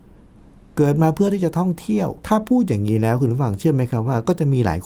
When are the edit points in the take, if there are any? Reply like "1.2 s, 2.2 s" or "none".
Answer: 2.2 s